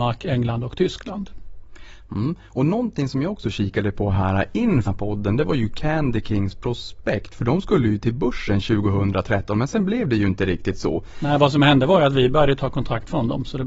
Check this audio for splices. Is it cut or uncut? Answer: cut